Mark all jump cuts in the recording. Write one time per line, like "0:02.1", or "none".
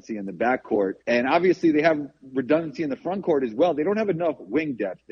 0:01.0